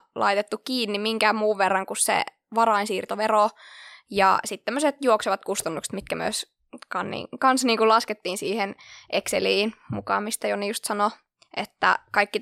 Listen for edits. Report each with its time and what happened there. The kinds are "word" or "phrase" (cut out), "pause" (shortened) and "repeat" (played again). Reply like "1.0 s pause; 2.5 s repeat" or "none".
none